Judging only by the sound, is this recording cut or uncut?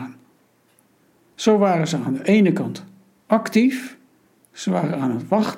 uncut